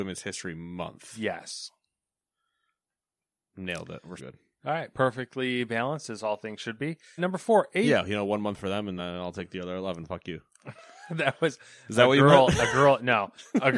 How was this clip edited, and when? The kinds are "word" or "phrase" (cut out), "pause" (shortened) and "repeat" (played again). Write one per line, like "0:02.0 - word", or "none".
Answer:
0:04.2 - word
0:07.2 - word
0:09.0 - word